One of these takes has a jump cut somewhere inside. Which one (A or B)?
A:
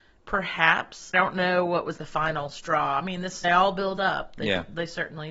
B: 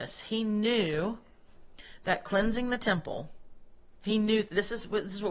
A